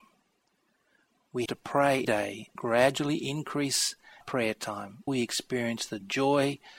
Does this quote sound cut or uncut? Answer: cut